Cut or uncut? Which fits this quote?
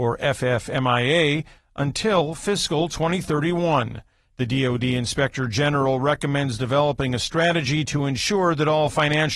uncut